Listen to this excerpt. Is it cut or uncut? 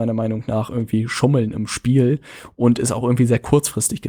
uncut